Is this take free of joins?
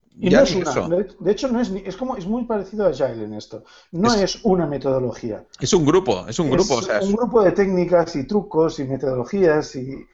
yes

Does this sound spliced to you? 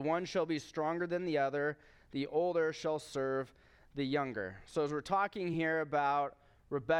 no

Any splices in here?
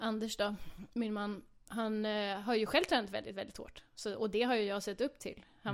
no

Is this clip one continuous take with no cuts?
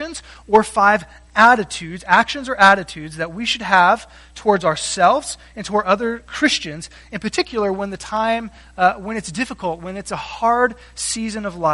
yes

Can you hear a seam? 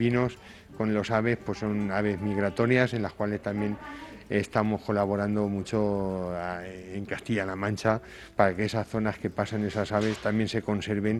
no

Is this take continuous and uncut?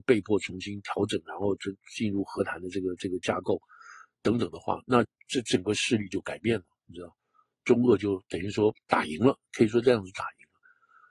yes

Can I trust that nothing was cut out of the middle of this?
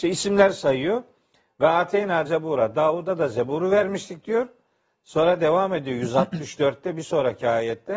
no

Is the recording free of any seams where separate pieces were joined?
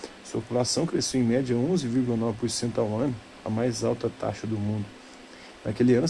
yes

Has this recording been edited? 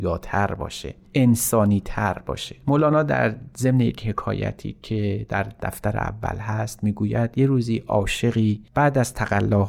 yes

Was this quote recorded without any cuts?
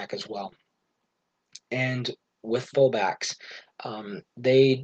no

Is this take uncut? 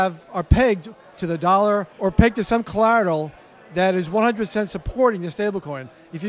no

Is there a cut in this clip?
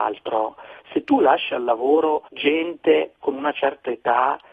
yes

